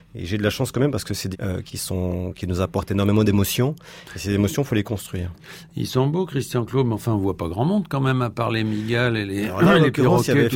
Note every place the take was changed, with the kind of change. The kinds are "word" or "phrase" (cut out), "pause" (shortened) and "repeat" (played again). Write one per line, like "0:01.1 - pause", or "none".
0:01.3 - phrase
0:01.7 - phrase